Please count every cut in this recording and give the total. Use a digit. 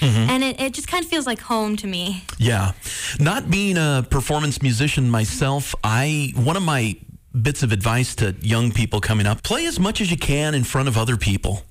1